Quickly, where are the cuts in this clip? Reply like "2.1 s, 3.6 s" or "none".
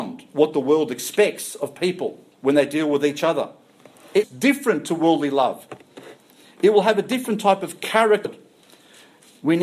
2.3 s, 4.2 s, 8.2 s